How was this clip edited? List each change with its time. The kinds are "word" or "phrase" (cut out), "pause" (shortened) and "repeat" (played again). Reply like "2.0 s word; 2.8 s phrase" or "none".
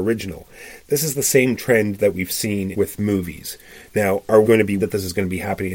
2.7 s phrase; 4.4 s word; 4.8 s word